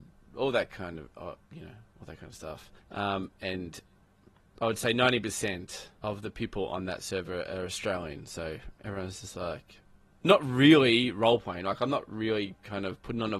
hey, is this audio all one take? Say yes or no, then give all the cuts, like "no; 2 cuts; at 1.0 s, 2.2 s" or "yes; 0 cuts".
no; 3 cuts; at 1.4 s, 2.8 s, 6.0 s